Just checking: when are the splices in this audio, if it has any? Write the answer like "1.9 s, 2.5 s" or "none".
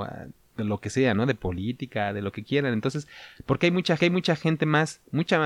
4.0 s